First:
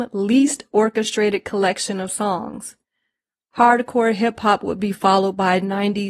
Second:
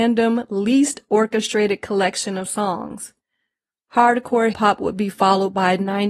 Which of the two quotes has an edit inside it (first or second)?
second